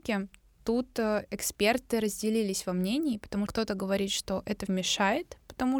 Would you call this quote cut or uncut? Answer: cut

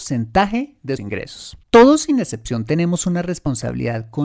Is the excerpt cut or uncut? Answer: cut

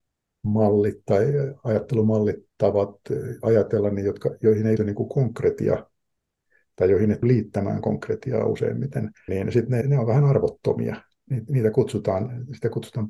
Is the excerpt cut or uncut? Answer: cut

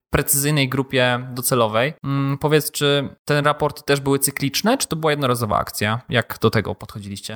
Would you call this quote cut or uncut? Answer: uncut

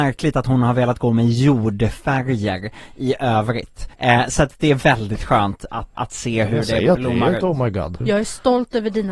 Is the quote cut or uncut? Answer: cut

